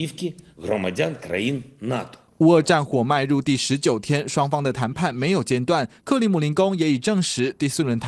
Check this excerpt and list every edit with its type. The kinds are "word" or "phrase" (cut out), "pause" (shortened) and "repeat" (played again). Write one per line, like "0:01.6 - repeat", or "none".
none